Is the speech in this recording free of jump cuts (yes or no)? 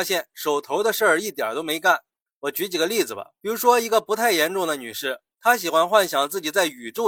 yes